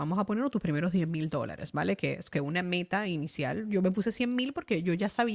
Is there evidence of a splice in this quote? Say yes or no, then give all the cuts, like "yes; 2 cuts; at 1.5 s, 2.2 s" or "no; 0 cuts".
yes; 1 cut; at 2.3 s